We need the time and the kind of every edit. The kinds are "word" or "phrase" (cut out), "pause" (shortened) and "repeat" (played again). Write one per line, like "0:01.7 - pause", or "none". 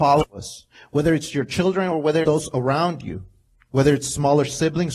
0:02.2 - word
0:03.5 - pause